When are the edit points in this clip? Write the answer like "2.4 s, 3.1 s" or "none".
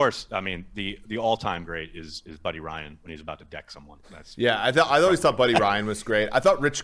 4.0 s